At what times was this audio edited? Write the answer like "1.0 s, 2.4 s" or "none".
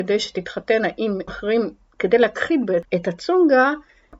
1.3 s, 2.8 s